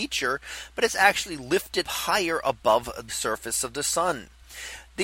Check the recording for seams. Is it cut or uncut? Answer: cut